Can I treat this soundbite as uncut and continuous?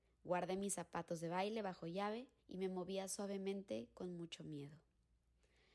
no; 1 cut; at 2.4 s

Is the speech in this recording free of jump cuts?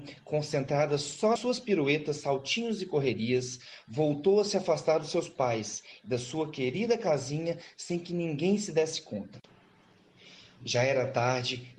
no; 1 cut; at 1.4 s

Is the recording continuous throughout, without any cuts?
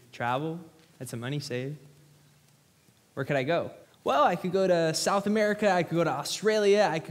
no; 1 cut; at 3.8 s

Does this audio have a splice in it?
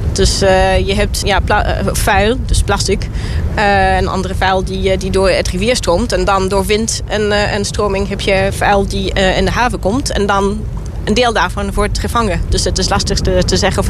yes; 1 cut; at 1.2 s

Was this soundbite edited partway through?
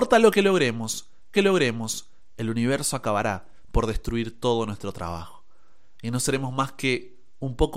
yes; 1 cut; at 1.3 s

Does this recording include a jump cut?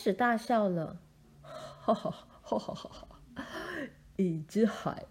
no; 0 cuts

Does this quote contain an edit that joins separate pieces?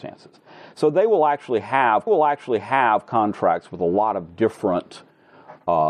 yes; 1 cut; at 2.1 s

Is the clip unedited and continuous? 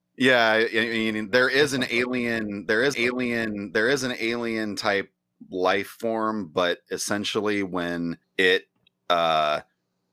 no; 2 cuts; at 2.9 s, 8.2 s

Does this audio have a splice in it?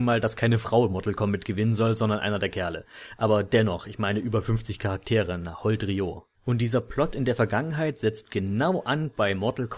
yes; 1 cut; at 6.3 s

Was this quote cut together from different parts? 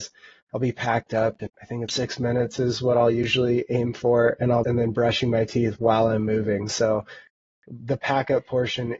yes; 3 cuts; at 1.5 s, 1.9 s, 4.6 s

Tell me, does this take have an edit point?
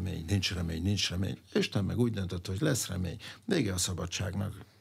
no; 0 cuts

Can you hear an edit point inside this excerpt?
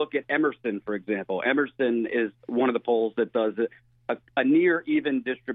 no; 0 cuts

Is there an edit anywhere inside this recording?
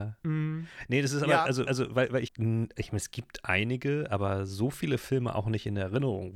yes; 2 cuts; at 1.7 s, 2.3 s

